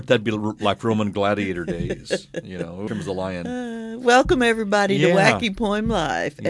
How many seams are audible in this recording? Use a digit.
1